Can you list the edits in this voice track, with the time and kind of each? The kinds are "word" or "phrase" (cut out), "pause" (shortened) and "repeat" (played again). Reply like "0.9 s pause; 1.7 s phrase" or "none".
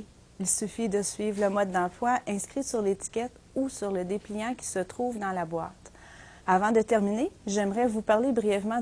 6.4 s pause